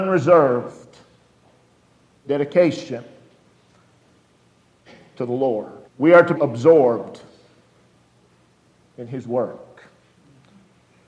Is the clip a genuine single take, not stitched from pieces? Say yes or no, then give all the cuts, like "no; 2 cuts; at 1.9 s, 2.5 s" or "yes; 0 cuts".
no; 2 cuts; at 5.9 s, 6.4 s